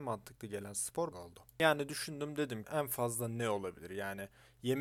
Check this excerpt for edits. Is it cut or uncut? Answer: cut